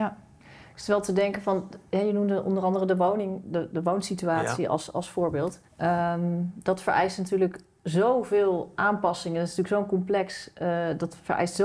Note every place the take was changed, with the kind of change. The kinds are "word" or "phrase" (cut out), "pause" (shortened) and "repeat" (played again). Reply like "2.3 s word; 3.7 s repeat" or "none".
5.7 s pause